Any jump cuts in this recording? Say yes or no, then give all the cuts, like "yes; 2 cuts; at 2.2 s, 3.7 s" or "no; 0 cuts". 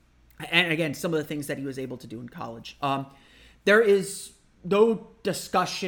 no; 0 cuts